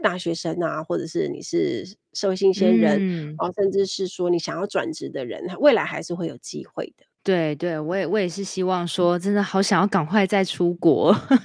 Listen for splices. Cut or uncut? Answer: cut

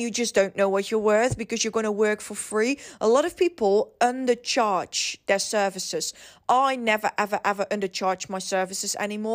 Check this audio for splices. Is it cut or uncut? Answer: uncut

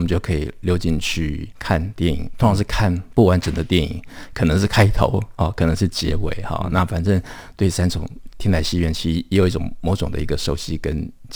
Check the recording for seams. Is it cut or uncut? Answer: cut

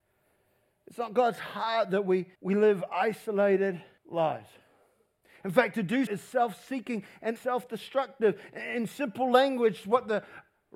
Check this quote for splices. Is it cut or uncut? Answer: cut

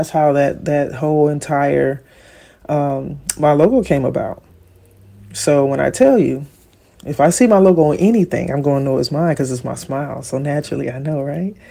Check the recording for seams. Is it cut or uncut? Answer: uncut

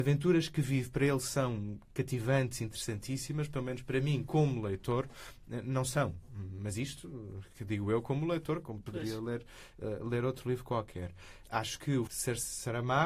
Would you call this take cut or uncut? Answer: cut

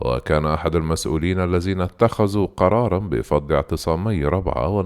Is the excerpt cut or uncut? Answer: uncut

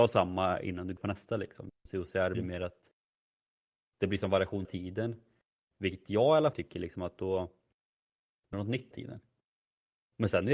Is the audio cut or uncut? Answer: cut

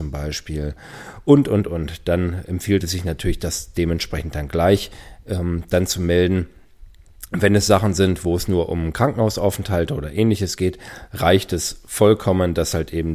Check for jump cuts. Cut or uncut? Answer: uncut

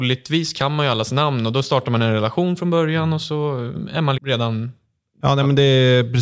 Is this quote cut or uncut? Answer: cut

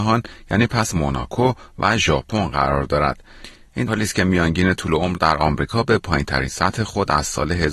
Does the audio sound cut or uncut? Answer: cut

